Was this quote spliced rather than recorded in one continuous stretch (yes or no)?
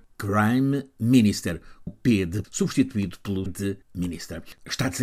yes